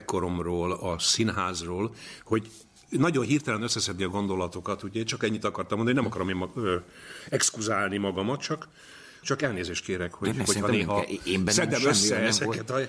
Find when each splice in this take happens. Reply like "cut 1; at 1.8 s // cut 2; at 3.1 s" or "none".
none

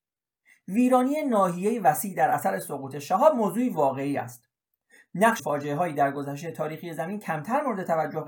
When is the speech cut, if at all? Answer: cut 1; at 5.4 s

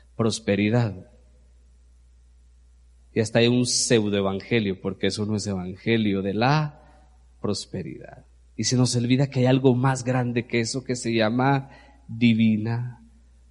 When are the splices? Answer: none

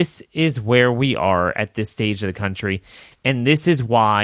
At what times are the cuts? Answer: none

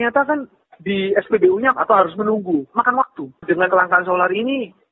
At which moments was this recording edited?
cut 1; at 1.7 s // cut 2; at 2.7 s // cut 3; at 3.7 s

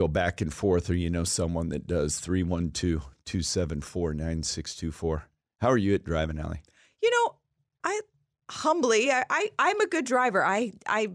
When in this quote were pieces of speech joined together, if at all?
none

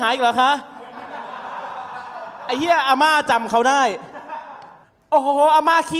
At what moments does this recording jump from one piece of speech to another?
cut 1; at 4.8 s

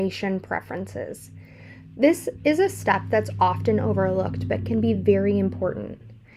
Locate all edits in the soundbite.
none

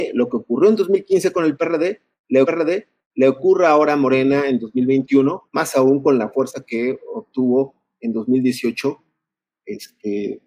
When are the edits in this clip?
cut 1; at 2.4 s // cut 2; at 5.5 s

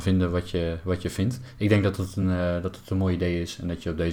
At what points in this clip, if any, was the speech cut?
none

